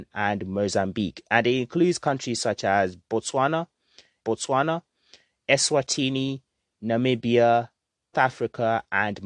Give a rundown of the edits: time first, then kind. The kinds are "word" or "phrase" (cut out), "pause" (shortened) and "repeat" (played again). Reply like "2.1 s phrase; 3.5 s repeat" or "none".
4.2 s repeat; 8.1 s word